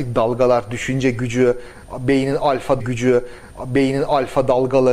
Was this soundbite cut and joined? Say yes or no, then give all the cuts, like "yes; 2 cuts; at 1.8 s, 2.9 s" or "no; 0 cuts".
yes; 1 cut; at 2.8 s